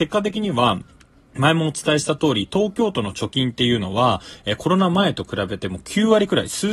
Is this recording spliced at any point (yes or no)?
no